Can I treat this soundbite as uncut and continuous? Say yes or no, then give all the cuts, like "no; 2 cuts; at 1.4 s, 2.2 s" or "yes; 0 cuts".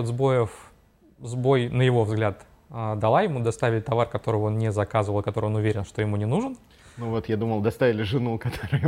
yes; 0 cuts